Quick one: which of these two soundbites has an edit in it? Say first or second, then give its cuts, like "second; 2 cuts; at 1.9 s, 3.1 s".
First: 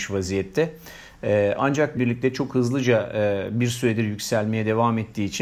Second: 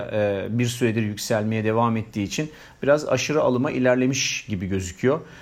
first; 1 cut; at 2.0 s